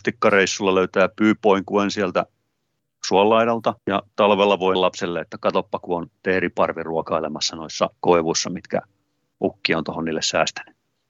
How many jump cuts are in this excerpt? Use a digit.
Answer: 3